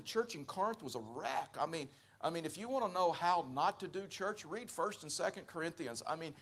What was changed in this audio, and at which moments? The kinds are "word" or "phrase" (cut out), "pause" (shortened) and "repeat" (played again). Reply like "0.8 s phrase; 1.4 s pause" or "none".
none